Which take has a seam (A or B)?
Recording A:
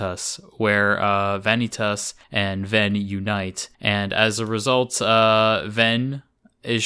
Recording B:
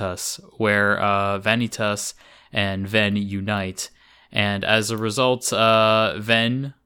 A